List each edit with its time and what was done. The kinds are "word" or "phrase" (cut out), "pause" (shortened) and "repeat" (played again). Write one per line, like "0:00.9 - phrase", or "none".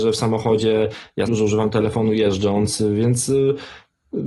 0:01.3 - word